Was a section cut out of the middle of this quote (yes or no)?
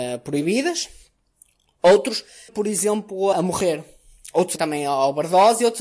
yes